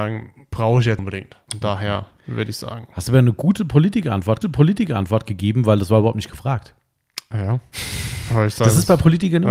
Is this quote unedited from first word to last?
no; 3 cuts; at 1.0 s, 1.5 s, 4.4 s

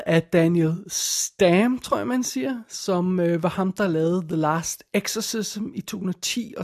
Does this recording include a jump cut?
no; 0 cuts

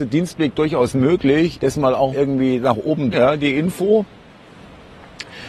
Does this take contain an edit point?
yes; 3 cuts; at 1.5 s, 2.1 s, 3.1 s

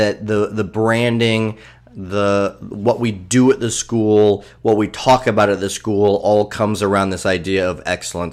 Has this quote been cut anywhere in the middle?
no; 0 cuts

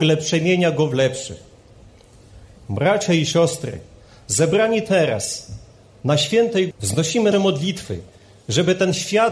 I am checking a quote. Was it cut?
yes; 3 cuts; at 4.0 s, 6.7 s, 7.3 s

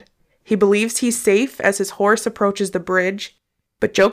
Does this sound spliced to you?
no; 0 cuts

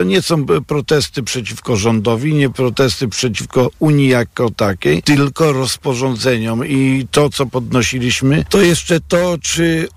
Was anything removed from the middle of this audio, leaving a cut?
no; 0 cuts

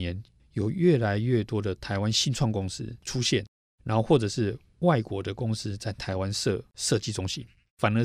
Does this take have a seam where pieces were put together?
no; 0 cuts

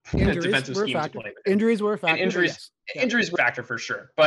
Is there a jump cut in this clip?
yes; 1 cut; at 3.4 s

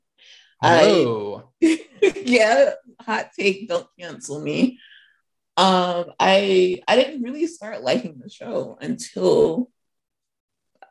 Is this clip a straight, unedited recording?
yes; 0 cuts

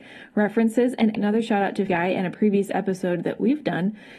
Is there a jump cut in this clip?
yes; 2 cuts; at 1.2 s, 1.9 s

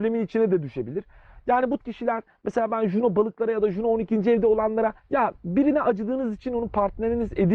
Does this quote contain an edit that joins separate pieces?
yes; 2 cuts; at 1.8 s, 5.0 s

